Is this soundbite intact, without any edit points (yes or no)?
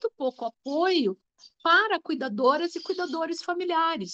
yes